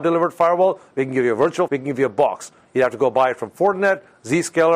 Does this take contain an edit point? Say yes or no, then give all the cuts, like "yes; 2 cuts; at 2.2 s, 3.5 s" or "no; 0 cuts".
yes; 1 cut; at 1.7 s